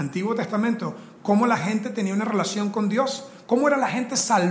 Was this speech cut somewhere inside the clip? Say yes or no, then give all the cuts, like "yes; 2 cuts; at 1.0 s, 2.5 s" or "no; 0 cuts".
no; 0 cuts